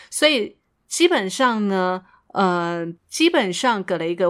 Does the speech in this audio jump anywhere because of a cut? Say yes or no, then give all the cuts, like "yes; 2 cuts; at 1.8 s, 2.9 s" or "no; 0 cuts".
no; 0 cuts